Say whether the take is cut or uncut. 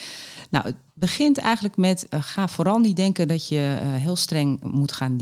uncut